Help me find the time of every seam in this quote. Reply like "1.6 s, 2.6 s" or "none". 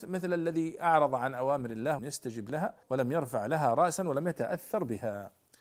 2.0 s, 2.8 s